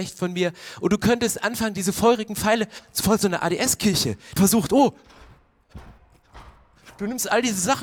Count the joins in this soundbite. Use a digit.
2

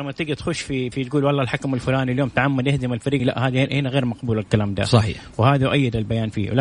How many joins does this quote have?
2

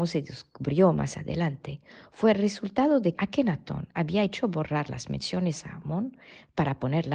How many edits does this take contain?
1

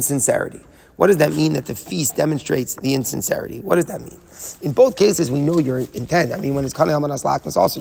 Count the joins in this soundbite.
0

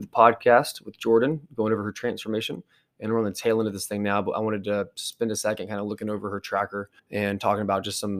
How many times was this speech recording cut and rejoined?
1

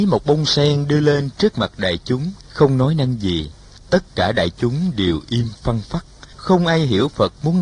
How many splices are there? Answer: 3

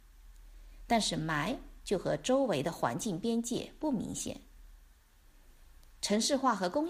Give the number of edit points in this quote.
0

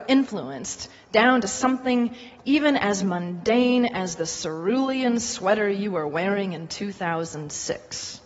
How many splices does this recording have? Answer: 0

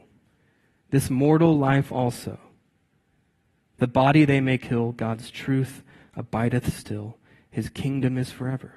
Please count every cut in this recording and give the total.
0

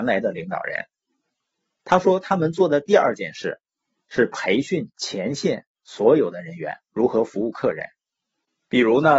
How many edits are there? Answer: 0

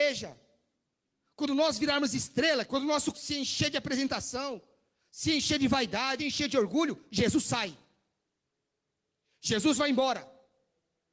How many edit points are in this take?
3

